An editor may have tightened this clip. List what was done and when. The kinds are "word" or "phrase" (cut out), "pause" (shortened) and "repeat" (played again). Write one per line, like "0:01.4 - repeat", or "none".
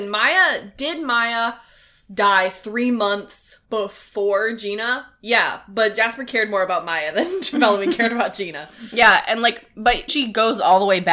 0:10.1 - word